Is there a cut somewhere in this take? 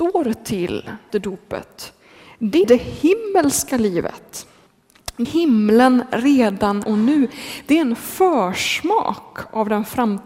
yes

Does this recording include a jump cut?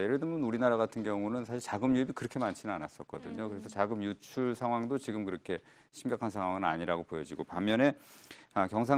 no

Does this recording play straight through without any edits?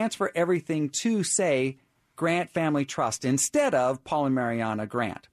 yes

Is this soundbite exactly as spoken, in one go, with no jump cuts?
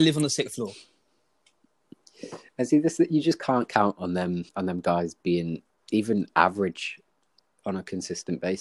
no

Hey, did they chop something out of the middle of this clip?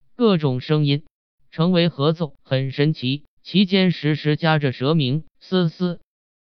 yes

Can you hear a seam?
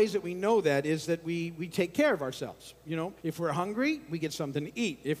yes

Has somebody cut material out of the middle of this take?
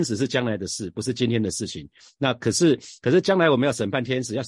no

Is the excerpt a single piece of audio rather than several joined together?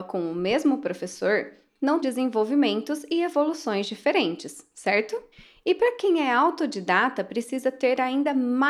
no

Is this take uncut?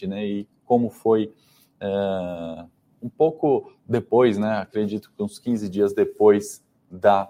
yes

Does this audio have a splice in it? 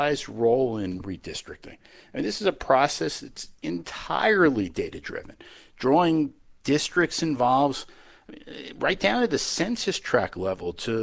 no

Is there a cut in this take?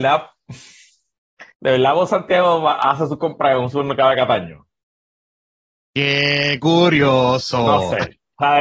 yes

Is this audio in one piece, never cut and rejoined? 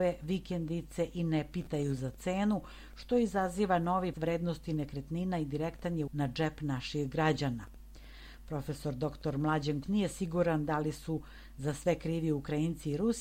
no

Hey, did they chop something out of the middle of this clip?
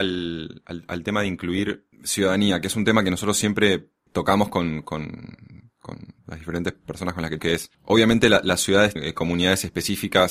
yes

